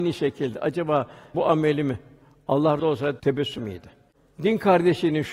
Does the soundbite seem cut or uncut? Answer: cut